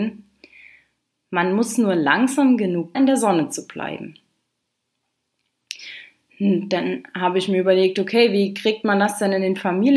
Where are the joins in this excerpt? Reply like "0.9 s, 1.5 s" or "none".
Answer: 2.9 s